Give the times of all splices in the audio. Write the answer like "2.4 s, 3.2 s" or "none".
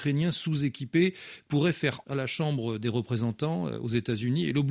2.0 s